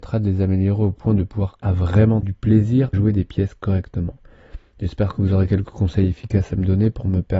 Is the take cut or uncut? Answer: cut